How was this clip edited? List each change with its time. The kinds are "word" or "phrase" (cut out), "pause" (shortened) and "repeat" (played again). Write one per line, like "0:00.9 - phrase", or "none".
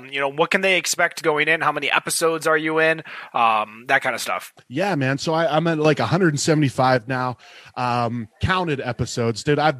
0:04.6 - pause
0:08.3 - pause